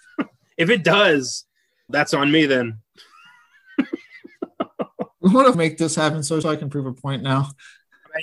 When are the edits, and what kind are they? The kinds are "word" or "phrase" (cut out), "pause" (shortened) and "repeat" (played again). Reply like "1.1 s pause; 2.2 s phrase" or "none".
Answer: 1.9 s word; 5.5 s phrase; 6.4 s word